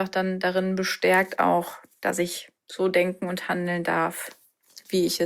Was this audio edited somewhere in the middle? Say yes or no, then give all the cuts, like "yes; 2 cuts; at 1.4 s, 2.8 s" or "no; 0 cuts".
yes; 1 cut; at 2.6 s